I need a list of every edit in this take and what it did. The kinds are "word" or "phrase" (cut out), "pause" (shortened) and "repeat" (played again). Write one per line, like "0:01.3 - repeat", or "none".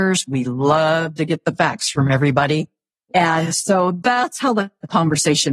none

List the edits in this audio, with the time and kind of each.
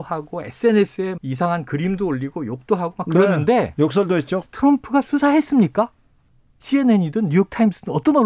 0:01.2 - word
0:04.5 - pause

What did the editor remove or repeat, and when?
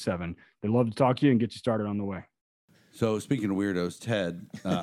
0:02.4 - pause

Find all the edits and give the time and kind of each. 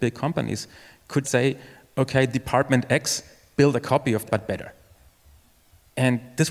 0:01.2 - word
0:04.3 - word

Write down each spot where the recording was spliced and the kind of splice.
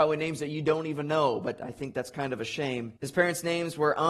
0:03.0 - pause

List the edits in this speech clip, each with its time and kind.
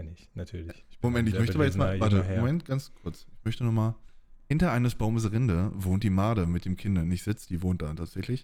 none

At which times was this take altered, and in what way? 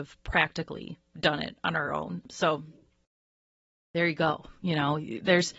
none

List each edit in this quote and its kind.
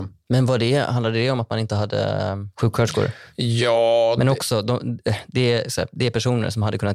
0:02.5 - pause

